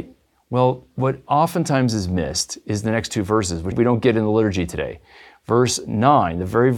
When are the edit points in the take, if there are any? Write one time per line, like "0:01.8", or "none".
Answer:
0:03.7